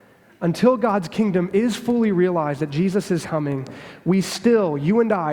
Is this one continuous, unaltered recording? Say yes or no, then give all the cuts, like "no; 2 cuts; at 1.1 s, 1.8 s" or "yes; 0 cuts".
no; 1 cut; at 3.2 s